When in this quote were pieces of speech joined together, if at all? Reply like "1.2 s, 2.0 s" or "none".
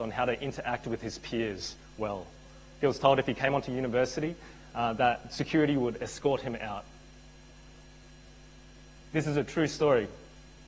none

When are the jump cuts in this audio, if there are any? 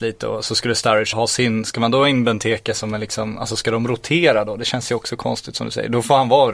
1.1 s

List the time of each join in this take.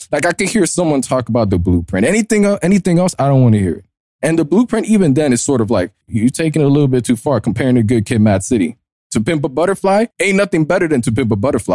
6.0 s, 10.1 s

